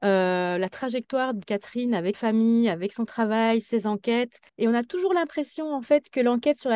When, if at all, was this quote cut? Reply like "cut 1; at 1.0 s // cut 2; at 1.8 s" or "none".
cut 1; at 1.4 s // cut 2; at 2.1 s // cut 3; at 4.5 s